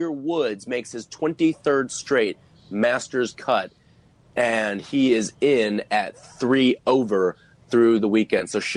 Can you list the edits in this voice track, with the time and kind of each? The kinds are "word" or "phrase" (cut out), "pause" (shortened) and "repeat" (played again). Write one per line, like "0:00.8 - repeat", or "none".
none